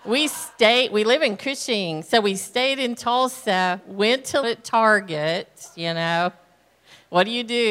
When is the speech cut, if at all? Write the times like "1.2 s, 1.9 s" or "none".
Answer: 4.4 s